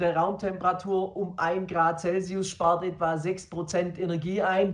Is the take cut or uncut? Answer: uncut